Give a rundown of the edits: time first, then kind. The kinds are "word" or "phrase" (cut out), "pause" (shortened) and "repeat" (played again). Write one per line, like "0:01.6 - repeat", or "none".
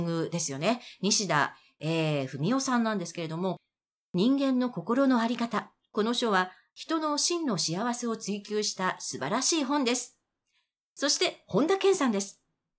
none